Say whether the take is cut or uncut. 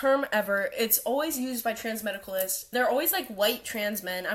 cut